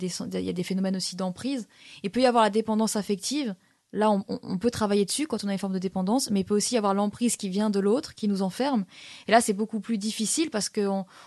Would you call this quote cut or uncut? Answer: uncut